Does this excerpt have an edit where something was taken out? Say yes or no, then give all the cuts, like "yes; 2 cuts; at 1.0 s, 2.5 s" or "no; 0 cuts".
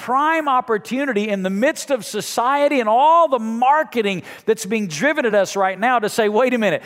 no; 0 cuts